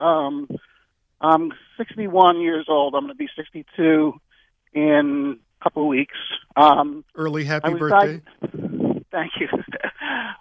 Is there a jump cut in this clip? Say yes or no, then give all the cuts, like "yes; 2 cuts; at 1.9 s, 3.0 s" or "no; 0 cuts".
no; 0 cuts